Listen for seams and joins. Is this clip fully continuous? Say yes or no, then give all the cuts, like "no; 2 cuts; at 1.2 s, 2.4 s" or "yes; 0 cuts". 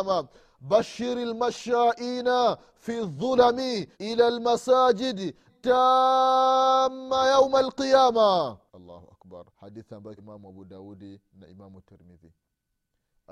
no; 5 cuts; at 3.9 s, 5.5 s, 8.7 s, 9.5 s, 10.2 s